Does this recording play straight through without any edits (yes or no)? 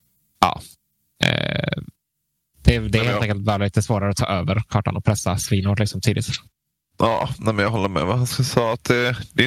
yes